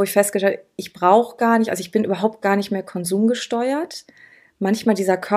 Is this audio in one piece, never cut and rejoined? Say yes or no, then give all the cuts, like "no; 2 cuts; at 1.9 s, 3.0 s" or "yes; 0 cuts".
yes; 0 cuts